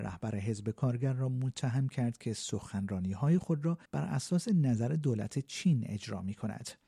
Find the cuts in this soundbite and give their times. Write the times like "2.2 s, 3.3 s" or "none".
3.8 s

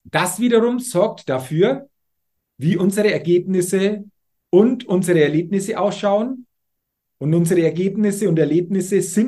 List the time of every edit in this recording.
none

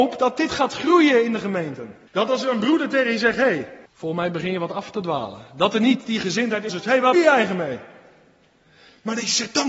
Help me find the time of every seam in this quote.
2.1 s, 3.9 s, 6.7 s, 7.1 s

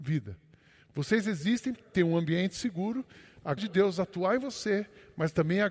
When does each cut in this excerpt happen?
1.7 s, 3.6 s

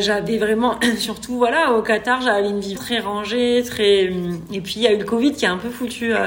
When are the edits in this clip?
2.7 s

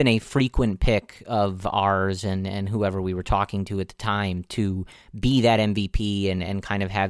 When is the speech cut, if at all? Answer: none

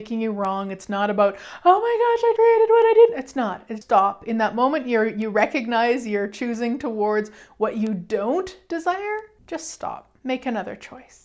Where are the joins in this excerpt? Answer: 2.4 s, 3.8 s, 9.4 s, 10.2 s

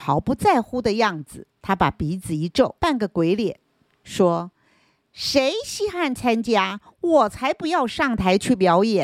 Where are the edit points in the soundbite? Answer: 1.6 s, 2.8 s, 3.8 s

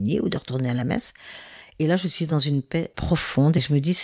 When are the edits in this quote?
none

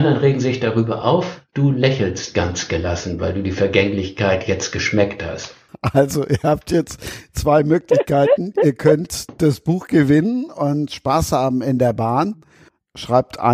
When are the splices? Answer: none

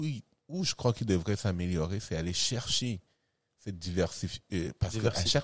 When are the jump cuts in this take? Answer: none

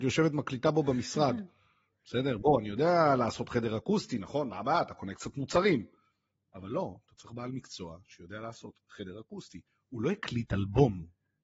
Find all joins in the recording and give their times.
none

